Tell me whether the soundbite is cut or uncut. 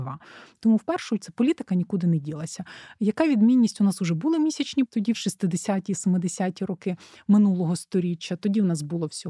cut